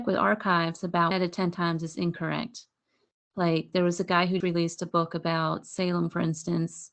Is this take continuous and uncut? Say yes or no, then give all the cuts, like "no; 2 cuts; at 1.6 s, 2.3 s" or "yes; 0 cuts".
no; 2 cuts; at 1.1 s, 4.4 s